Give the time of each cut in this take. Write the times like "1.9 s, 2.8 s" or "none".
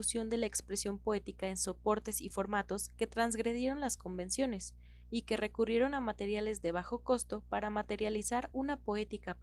none